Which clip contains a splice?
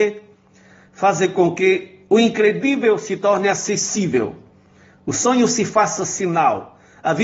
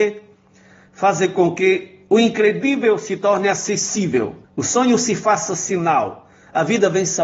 second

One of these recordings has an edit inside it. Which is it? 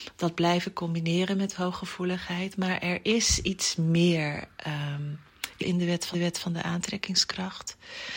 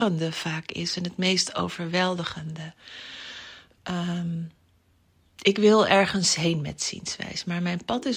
first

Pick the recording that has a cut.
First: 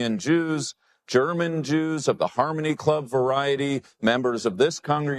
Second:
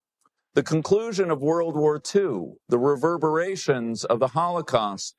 second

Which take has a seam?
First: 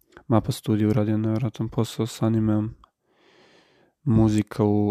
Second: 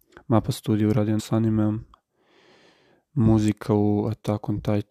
second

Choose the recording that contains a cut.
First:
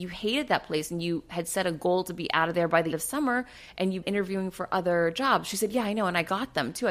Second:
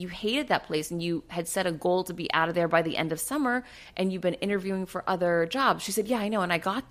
first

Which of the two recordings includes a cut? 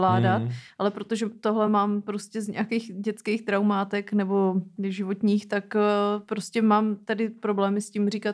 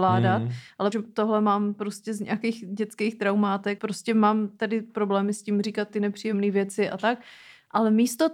second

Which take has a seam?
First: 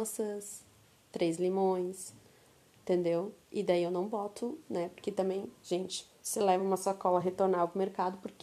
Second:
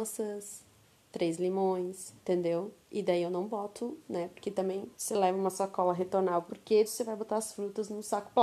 second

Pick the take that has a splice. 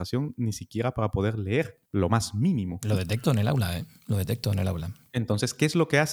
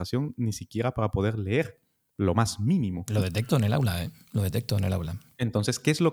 first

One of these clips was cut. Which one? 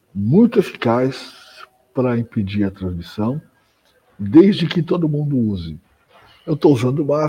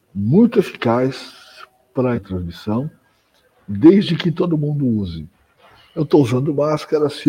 second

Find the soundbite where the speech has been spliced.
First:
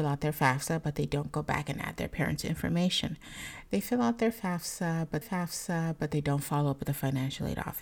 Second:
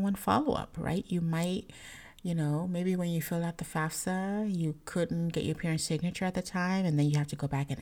first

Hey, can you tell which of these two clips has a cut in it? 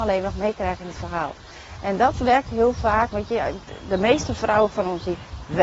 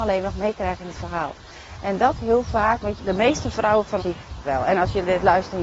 second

